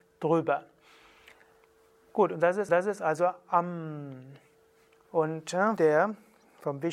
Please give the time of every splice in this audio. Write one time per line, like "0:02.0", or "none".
0:02.7
0:05.8